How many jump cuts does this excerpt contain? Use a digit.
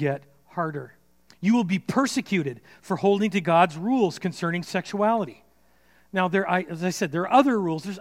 1